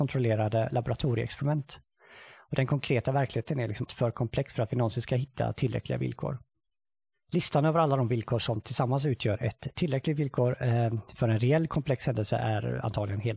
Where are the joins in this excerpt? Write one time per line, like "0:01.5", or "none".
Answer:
0:03.9